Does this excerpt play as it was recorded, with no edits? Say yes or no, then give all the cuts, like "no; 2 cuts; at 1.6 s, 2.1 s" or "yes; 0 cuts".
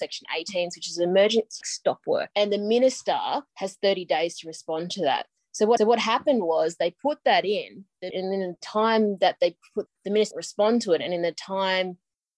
no; 7 cuts; at 1.6 s, 2.3 s, 3.5 s, 5.8 s, 8.1 s, 9.9 s, 10.3 s